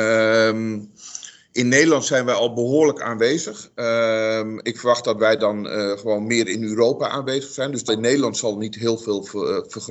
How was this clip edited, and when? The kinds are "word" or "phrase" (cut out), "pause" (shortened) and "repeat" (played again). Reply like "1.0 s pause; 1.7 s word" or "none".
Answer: 7.9 s word